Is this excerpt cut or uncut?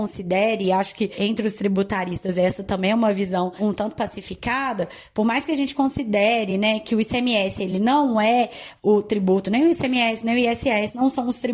uncut